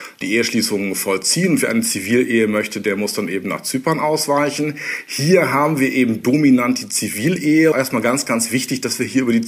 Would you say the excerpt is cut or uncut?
cut